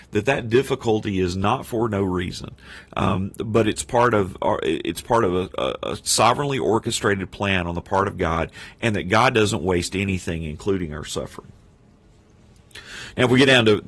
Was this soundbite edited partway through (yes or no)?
no